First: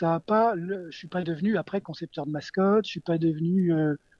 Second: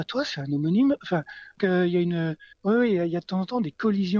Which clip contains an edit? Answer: second; 2 cuts; at 1.6 s, 2.5 s

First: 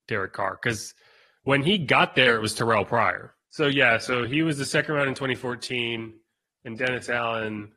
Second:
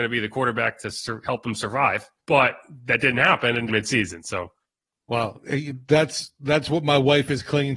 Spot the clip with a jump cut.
second; 2 cuts; at 2.2 s, 3.7 s

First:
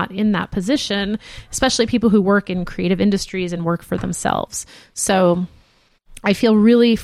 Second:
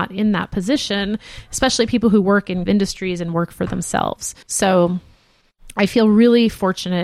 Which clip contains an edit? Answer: second; 2 cuts; at 2.7 s, 4.4 s

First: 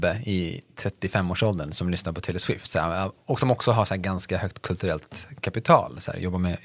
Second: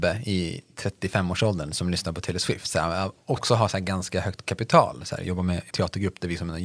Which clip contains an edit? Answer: second; 3 cuts; at 3.4 s, 4.4 s, 5.7 s

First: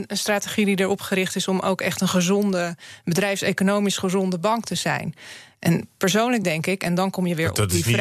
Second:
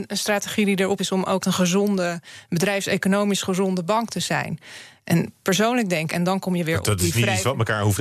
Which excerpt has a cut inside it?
second; 3 cuts; at 1.0 s, 1.4 s, 6.1 s

